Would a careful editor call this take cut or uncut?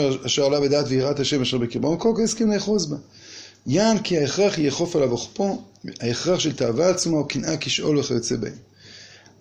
uncut